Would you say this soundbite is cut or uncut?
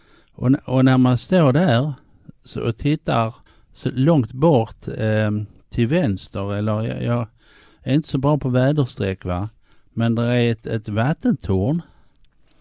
cut